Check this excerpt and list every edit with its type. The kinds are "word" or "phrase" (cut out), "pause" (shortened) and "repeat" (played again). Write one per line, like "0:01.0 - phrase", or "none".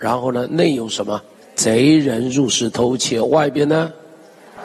0:01.3 - pause